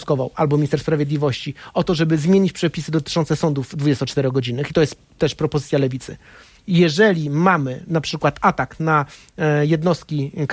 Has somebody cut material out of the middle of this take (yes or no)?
no